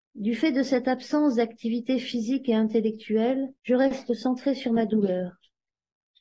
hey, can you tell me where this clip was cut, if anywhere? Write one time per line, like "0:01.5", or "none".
0:03.6